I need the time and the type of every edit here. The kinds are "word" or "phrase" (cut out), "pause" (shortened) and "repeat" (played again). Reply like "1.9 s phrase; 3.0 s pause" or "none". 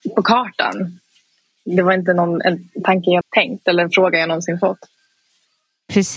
3.2 s word